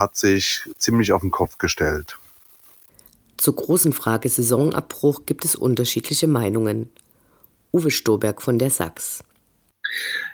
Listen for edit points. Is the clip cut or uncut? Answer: uncut